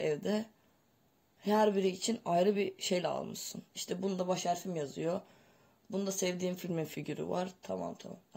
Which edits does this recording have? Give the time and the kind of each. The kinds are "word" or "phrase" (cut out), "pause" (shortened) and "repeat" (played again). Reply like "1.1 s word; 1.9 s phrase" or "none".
none